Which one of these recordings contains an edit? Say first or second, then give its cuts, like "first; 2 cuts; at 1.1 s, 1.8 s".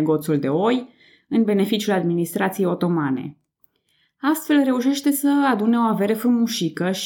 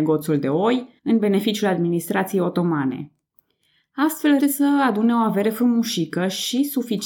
second; 2 cuts; at 1.0 s, 4.4 s